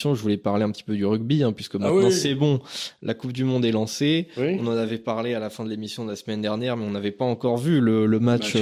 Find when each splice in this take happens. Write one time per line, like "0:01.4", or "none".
none

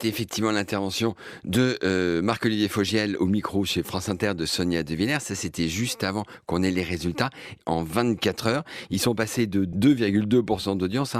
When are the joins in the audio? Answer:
none

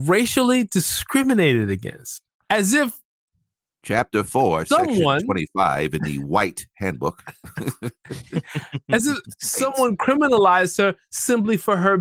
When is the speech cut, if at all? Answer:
none

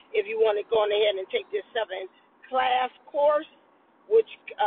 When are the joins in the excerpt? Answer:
none

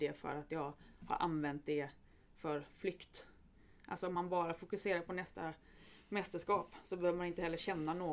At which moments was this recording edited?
none

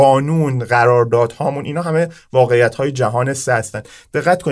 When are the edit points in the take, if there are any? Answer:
none

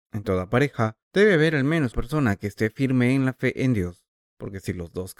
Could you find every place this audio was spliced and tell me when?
0:01.0
0:01.9
0:04.2

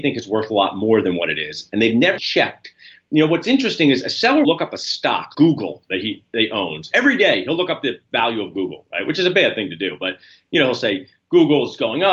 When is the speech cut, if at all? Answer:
0:02.2
0:04.4
0:05.3

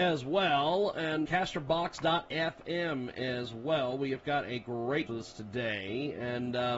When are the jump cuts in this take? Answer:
0:01.3
0:05.1

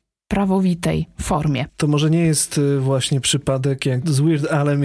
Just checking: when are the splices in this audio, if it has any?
none

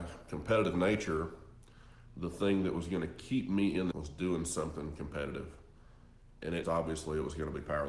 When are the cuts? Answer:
0:03.9
0:06.6

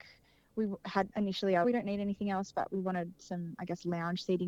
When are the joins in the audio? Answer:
0:01.1
0:01.6

